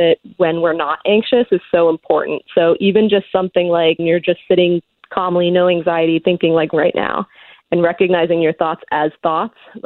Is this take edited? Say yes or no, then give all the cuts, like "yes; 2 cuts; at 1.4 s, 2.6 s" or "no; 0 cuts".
yes; 2 cuts; at 4.0 s, 6.7 s